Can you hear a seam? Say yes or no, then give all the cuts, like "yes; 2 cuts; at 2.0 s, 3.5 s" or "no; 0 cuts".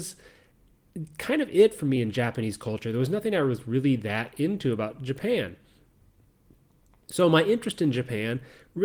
no; 0 cuts